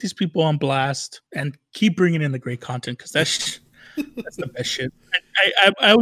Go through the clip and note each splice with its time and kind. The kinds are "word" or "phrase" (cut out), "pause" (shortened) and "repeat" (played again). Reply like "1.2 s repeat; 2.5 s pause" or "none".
1.3 s pause